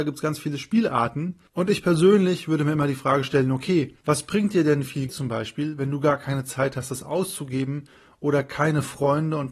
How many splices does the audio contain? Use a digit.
1